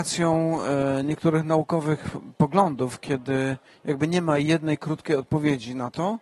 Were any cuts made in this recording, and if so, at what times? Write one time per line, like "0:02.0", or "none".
none